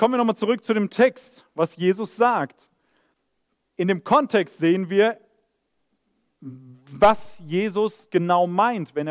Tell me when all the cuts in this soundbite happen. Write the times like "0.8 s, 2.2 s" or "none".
none